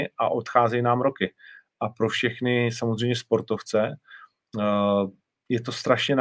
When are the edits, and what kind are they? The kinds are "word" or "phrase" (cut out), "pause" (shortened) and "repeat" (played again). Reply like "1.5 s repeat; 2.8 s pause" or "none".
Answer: none